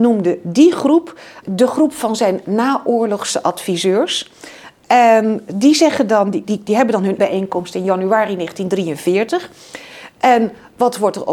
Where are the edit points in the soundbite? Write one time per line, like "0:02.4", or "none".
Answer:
0:01.4
0:06.4
0:07.2